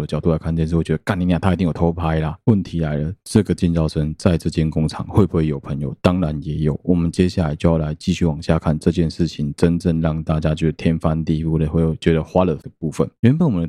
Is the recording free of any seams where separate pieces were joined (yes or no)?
no